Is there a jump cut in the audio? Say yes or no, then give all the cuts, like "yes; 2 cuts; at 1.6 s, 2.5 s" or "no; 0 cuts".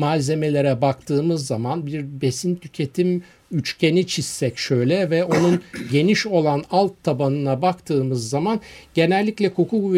no; 0 cuts